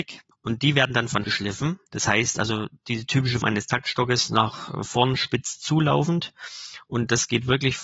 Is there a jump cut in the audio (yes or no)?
yes